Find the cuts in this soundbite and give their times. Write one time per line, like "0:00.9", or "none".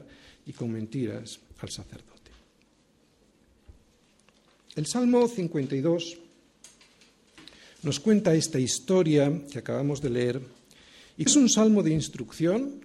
0:11.3